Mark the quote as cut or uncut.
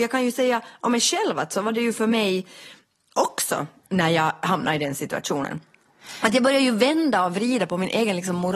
cut